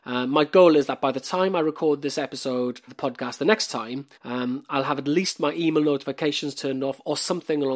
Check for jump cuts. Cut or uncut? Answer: cut